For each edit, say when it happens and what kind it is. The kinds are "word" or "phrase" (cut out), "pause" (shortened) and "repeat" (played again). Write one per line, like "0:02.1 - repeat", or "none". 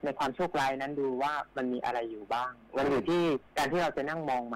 0:03.5 - pause